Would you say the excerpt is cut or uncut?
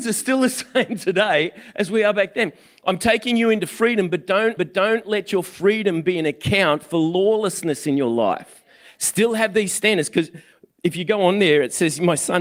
cut